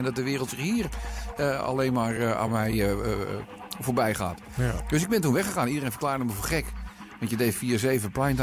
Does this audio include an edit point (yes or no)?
no